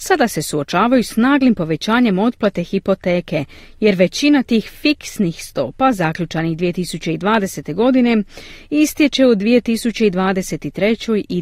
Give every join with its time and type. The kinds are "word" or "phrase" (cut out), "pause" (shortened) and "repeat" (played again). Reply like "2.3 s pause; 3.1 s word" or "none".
none